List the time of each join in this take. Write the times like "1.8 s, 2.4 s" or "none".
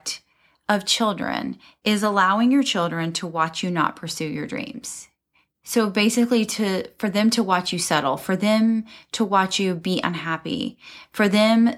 5.2 s